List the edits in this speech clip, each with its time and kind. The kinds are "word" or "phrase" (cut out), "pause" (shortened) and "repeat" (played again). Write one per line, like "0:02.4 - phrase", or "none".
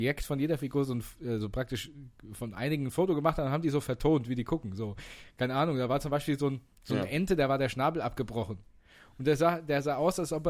none